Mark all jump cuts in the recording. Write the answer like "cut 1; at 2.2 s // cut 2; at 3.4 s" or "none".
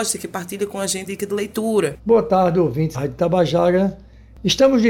cut 1; at 1.1 s // cut 2; at 2.9 s